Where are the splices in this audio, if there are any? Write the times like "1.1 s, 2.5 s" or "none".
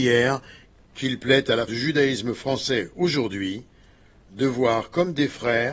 1.7 s